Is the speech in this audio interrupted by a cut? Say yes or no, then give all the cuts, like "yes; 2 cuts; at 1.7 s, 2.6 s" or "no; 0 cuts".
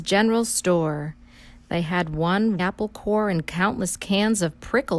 yes; 1 cut; at 2.6 s